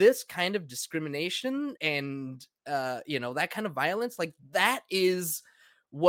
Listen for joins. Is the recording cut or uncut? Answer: cut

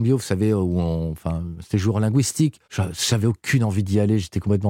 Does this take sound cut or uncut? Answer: cut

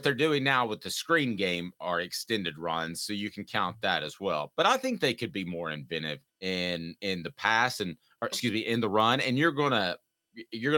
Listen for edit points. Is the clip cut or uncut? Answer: cut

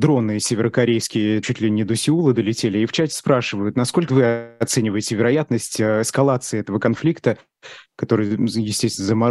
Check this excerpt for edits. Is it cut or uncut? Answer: cut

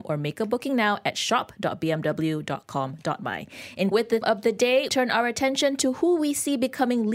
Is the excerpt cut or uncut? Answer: cut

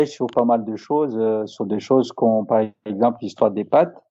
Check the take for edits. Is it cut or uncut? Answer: uncut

